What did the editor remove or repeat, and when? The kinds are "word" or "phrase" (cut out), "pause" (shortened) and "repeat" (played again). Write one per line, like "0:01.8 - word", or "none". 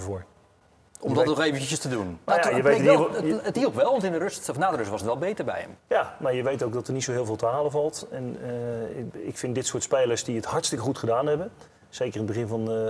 none